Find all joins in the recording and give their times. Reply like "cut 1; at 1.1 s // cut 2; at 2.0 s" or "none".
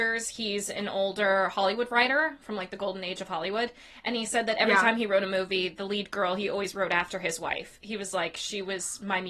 none